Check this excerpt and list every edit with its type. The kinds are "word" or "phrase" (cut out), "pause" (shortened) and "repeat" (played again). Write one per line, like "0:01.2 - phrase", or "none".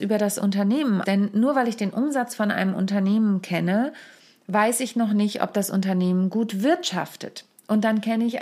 0:01.0 - word